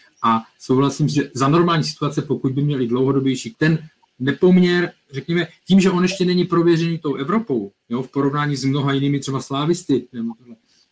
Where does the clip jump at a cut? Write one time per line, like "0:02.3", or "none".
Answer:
0:01.1
0:03.5
0:07.8

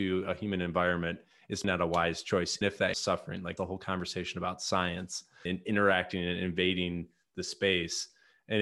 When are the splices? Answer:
0:01.6
0:02.6
0:02.9
0:03.6
0:05.5

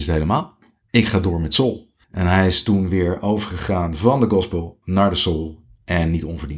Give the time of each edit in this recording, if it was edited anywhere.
0:02.0

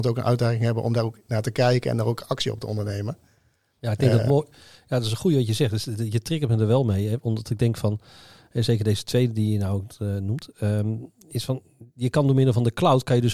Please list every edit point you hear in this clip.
none

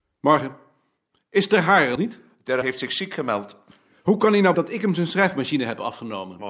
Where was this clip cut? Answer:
0:02.0
0:02.6
0:04.5

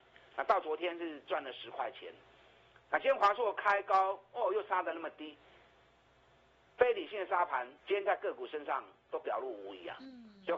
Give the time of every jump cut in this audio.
0:07.8

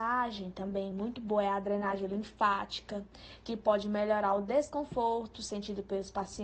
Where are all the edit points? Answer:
none

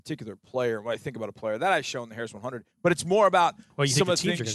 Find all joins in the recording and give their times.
0:02.7

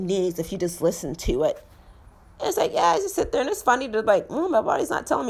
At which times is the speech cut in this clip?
none

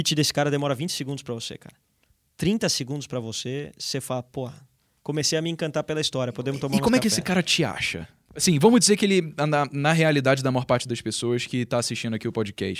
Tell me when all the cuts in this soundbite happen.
none

